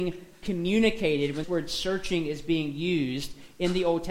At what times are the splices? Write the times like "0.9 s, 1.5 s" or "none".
1.4 s